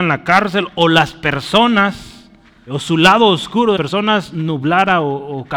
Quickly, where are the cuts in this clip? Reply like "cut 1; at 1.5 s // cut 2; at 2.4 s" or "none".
cut 1; at 2.7 s // cut 2; at 3.8 s